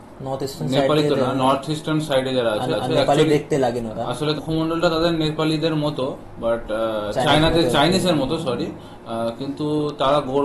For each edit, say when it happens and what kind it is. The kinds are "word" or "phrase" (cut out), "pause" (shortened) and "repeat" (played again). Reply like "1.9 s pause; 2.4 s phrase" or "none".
2.7 s repeat; 4.4 s word